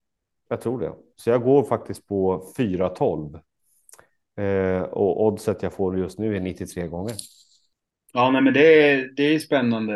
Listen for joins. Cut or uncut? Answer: uncut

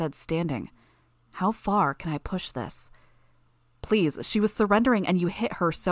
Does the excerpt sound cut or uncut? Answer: uncut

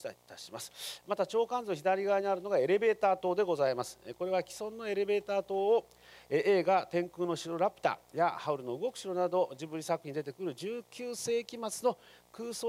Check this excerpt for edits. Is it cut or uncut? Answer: uncut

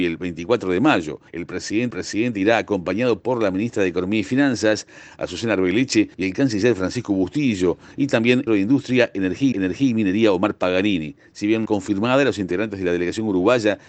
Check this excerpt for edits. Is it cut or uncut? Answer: cut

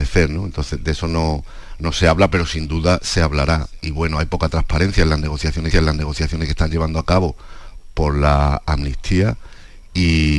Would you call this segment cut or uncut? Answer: cut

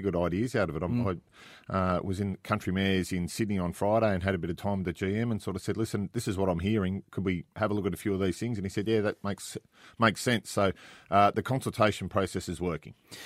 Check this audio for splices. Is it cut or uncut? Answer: uncut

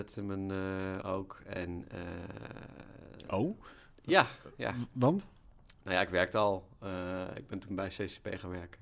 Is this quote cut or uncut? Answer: cut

